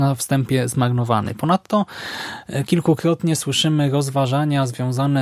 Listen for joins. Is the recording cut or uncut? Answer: uncut